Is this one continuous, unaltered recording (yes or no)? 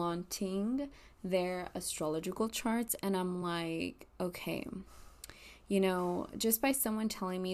yes